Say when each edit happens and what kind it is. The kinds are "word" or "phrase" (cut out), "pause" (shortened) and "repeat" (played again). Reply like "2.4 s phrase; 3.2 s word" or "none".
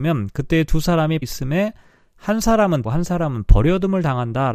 1.2 s word; 2.8 s word